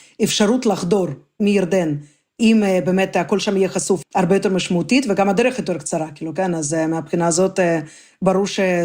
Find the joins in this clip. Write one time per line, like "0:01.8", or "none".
0:04.0